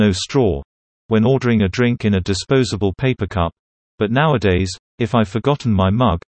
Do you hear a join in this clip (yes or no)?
no